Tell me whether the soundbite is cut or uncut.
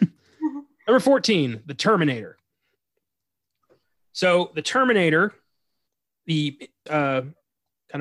cut